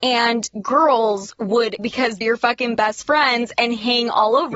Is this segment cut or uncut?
cut